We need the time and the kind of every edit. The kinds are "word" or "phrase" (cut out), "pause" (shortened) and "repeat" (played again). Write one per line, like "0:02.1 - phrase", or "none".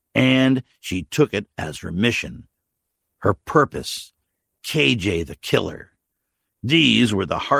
none